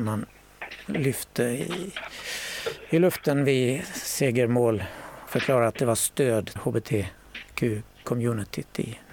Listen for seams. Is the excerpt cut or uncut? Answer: cut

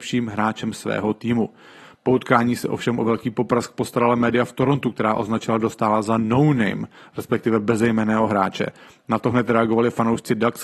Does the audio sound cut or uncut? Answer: uncut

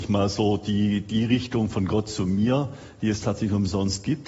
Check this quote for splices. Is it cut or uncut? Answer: uncut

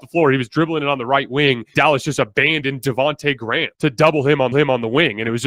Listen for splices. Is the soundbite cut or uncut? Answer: cut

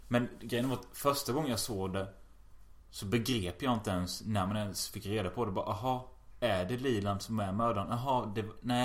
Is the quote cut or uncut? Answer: uncut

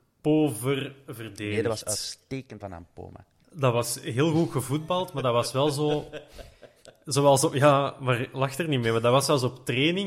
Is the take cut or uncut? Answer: cut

